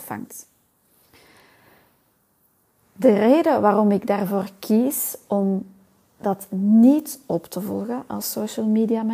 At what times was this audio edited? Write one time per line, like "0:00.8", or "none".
none